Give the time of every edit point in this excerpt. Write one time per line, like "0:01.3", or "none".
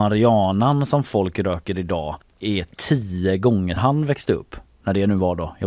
0:02.2
0:03.8